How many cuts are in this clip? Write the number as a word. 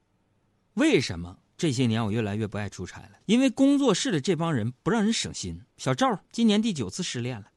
four